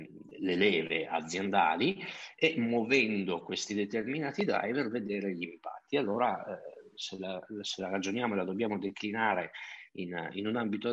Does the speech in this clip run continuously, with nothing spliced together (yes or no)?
yes